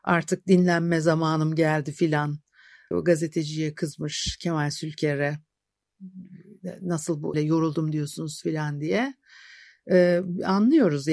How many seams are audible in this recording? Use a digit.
2